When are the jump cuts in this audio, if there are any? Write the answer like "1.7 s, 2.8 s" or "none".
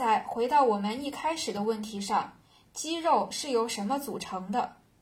none